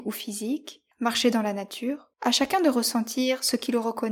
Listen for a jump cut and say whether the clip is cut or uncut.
cut